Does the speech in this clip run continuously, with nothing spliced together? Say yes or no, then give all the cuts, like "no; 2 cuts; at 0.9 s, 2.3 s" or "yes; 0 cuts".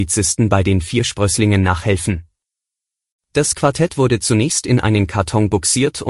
yes; 0 cuts